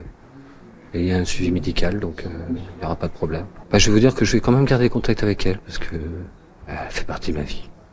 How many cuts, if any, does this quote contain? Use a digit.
0